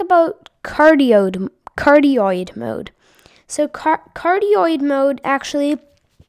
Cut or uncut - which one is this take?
cut